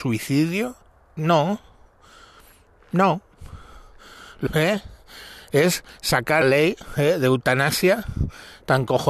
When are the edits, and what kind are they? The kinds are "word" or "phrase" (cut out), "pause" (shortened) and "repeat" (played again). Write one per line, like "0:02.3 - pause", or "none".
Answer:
0:04.5 - word
0:06.4 - word

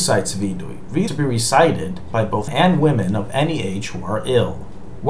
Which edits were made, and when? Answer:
0:01.1 - word
0:02.5 - word

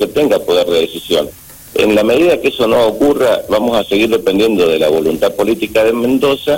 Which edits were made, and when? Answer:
none

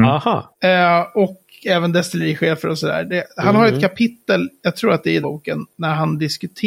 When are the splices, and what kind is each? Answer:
0:05.2 - word

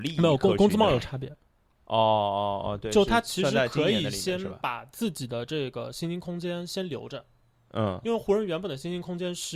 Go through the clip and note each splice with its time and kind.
none

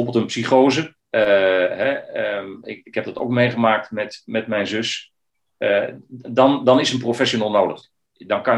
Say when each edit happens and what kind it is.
0:01.0 - pause

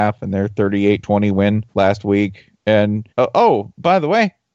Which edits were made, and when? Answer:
0:01.7 - pause
0:03.1 - pause

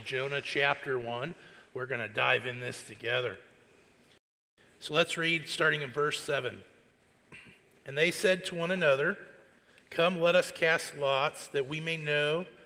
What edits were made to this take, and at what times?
none

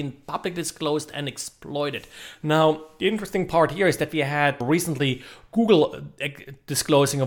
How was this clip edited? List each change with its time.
0:04.6 - word

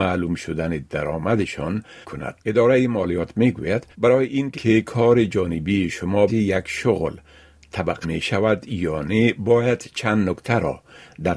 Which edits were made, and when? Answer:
0:02.0 - word
0:02.4 - pause
0:03.9 - pause
0:04.5 - word
0:06.3 - phrase
0:08.0 - word

